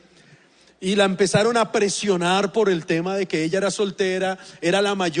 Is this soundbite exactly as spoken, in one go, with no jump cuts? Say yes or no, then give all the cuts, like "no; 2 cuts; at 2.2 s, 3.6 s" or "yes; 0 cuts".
yes; 0 cuts